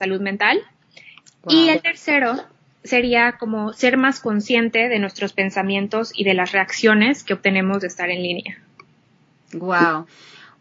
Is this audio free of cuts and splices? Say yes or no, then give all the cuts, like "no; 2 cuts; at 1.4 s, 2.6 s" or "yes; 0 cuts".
yes; 0 cuts